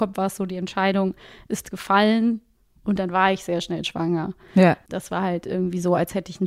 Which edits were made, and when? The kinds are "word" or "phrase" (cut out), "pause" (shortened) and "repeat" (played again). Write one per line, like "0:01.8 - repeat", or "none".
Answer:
none